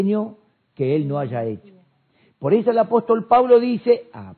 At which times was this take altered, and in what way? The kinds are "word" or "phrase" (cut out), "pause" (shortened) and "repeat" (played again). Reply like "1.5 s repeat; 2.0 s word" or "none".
none